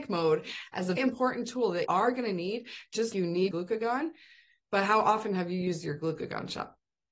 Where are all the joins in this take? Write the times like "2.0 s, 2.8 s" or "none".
1.0 s, 1.9 s, 3.1 s, 3.5 s